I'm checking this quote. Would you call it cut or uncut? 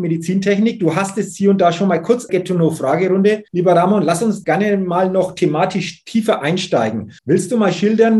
cut